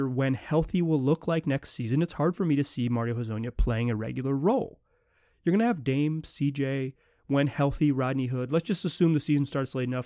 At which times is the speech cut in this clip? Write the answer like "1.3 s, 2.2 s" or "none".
none